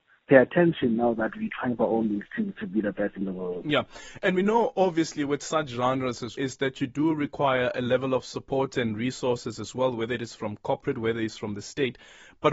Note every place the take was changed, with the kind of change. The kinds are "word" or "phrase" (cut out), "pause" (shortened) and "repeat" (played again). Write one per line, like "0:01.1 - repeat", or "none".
0:06.3 - word